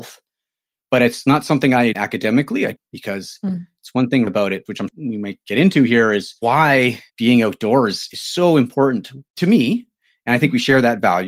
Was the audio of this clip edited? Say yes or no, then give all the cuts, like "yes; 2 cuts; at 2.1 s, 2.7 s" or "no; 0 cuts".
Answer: yes; 5 cuts; at 1.9 s, 4.3 s, 4.9 s, 7.1 s, 9.3 s